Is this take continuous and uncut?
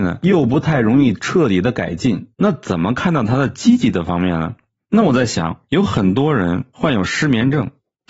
no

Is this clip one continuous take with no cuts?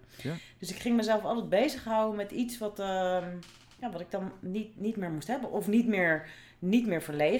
yes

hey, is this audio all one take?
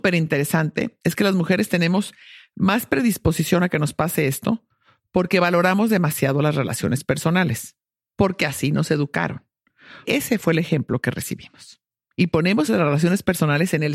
no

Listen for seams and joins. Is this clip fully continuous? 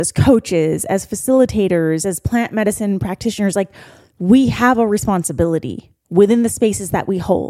yes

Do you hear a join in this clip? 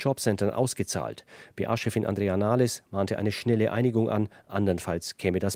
no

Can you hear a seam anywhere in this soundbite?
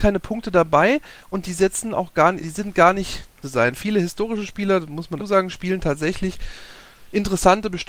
yes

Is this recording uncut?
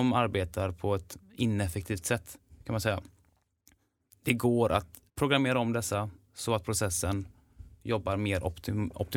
no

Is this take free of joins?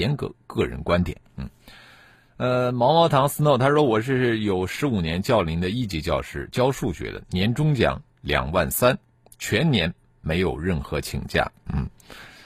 yes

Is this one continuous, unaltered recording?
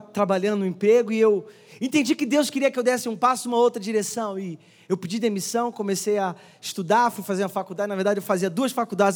yes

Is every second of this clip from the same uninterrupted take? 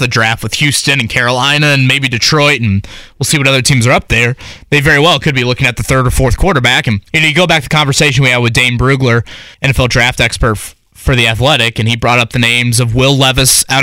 no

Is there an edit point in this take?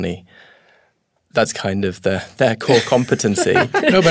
yes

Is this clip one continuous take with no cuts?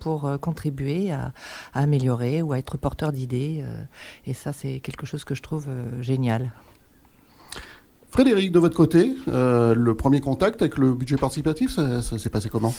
yes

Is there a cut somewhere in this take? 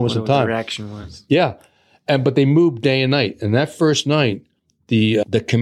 no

